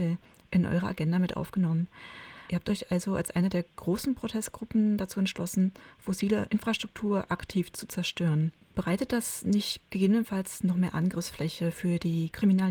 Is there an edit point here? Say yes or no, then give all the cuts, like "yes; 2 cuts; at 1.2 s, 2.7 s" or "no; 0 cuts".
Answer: no; 0 cuts